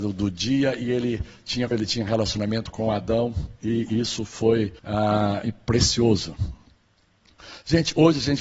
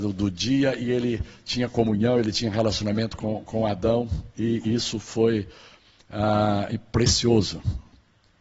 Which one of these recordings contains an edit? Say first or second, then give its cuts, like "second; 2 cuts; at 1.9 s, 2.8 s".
first; 3 cuts; at 1.7 s, 2.7 s, 4.8 s